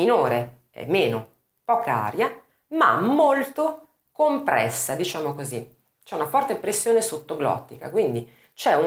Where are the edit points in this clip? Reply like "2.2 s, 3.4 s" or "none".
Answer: none